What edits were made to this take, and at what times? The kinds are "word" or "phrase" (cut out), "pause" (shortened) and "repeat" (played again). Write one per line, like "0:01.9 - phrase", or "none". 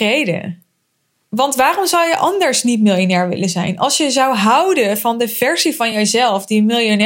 none